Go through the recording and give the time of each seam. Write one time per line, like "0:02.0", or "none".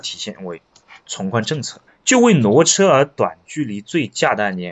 0:01.9

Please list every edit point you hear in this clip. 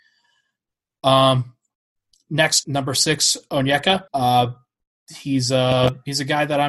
0:02.6
0:04.1

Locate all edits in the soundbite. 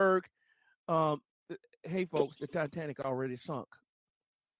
none

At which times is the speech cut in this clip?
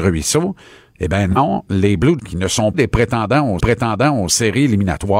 0:02.2
0:02.7
0:03.6

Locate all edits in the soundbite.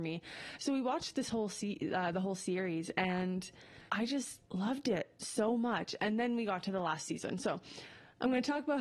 0:03.9
0:04.4

